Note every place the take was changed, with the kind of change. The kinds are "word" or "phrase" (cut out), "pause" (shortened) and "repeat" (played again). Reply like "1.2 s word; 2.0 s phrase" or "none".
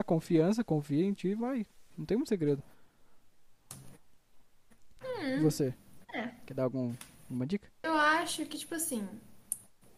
1.9 s pause; 5.0 s pause; 6.0 s pause; 7.7 s pause